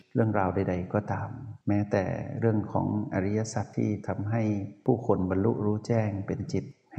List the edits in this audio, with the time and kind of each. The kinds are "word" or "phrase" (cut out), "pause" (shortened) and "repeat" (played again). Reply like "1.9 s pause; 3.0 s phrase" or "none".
1.6 s pause